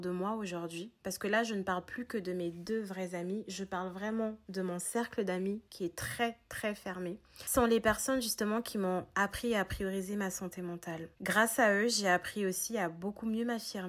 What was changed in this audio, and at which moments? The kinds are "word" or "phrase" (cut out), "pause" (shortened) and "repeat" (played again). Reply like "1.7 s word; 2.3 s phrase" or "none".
5.7 s pause; 11.1 s pause